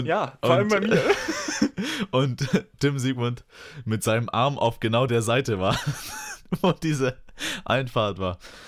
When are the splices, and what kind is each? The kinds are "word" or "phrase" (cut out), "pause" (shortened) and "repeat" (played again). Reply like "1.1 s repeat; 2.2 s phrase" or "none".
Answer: none